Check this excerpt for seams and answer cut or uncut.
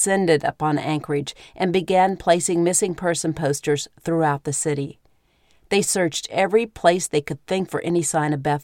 cut